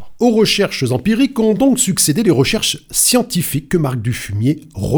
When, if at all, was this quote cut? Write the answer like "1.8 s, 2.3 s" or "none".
none